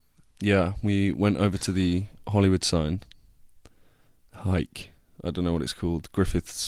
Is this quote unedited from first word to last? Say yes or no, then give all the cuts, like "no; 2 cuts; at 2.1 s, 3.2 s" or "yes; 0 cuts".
yes; 0 cuts